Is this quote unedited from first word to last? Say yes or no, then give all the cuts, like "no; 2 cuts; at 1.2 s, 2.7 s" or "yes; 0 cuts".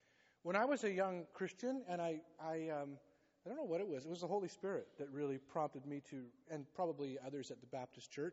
yes; 0 cuts